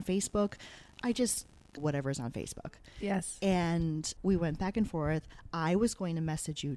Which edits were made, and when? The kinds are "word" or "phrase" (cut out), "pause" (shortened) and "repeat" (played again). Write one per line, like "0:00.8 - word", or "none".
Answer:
0:01.8 - phrase
0:04.2 - word